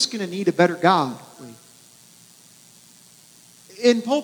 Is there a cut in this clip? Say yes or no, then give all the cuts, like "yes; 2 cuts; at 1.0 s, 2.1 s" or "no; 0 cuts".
yes; 1 cut; at 1.4 s